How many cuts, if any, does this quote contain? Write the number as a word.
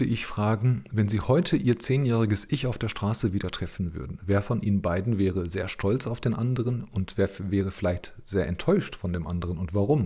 zero